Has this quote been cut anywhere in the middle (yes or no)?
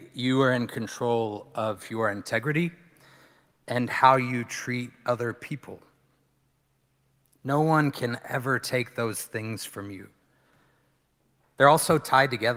no